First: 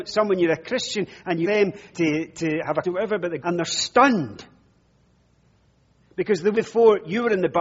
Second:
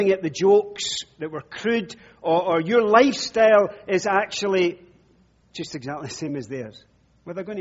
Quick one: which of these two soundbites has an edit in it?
first; 5 cuts; at 1.4 s, 1.9 s, 2.8 s, 3.4 s, 6.5 s

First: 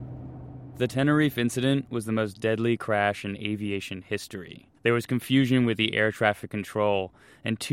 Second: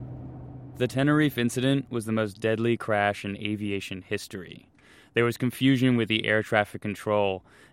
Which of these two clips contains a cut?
first; 1 cut; at 4.8 s

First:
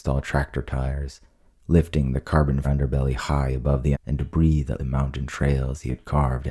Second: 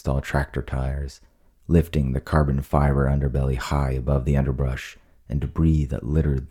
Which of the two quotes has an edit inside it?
first; 3 cuts; at 2.6 s, 3.9 s, 4.8 s

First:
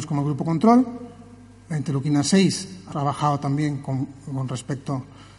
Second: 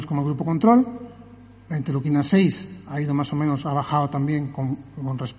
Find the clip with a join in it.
first; 1 cut; at 2.9 s

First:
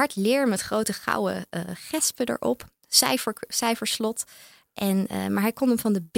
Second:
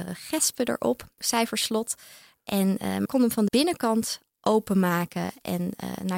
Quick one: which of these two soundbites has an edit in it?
second; 3 cuts; at 1.2 s, 3.1 s, 3.5 s

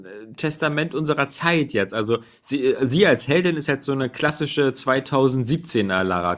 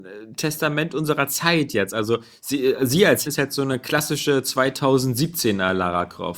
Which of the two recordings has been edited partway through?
second; 1 cut; at 3.3 s

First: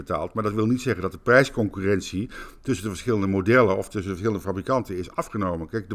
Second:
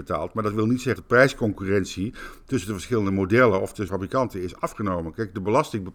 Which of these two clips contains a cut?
second; 2 cuts; at 1.0 s, 3.9 s

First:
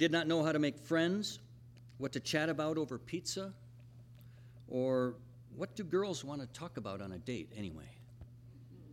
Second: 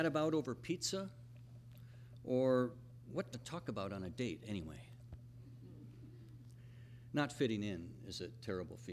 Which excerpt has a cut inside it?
second; 1 cut; at 3.3 s

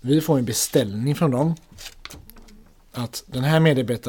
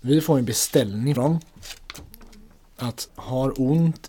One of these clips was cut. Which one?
second; 2 cuts; at 1.2 s, 3.1 s

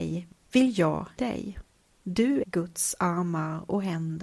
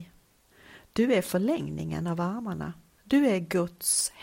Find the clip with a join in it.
first; 2 cuts; at 1.2 s, 2.4 s

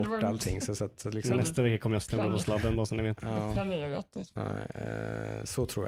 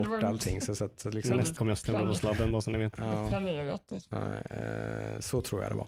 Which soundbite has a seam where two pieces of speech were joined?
second; 1 cut; at 1.6 s

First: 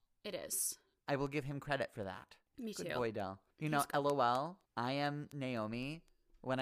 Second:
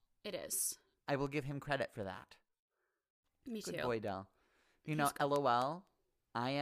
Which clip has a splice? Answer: first; 3 cuts; at 2.5 s, 3.5 s, 4.7 s

